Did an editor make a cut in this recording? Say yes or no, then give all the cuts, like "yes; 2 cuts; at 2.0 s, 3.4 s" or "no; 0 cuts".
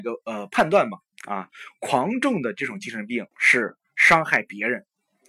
yes; 1 cut; at 3.3 s